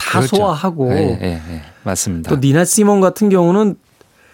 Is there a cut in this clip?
no; 0 cuts

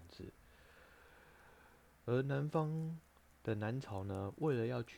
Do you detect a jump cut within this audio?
yes; 1 cut; at 1.9 s

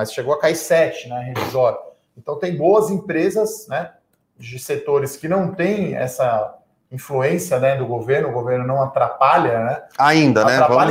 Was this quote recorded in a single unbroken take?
yes; 0 cuts

